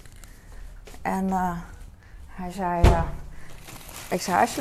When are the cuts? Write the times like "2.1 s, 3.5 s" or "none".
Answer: none